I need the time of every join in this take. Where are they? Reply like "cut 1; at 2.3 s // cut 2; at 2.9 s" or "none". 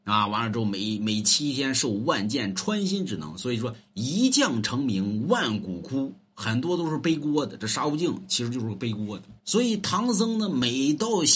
cut 1; at 9.4 s